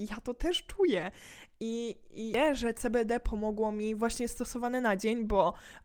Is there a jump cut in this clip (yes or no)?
no